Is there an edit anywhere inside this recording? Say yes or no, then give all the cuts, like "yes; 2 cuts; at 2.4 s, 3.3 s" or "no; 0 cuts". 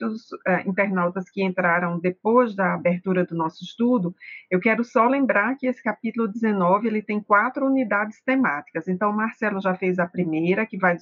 no; 0 cuts